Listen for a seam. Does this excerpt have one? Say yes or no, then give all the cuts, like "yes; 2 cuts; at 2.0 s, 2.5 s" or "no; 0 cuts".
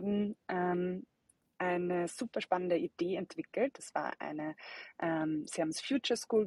no; 0 cuts